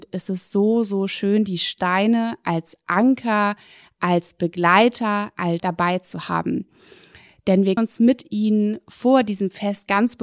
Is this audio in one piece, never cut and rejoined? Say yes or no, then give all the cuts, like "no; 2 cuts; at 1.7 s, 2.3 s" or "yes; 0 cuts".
no; 2 cuts; at 5.6 s, 7.8 s